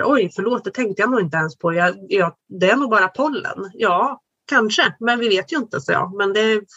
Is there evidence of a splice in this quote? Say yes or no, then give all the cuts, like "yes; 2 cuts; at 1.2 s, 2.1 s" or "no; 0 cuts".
no; 0 cuts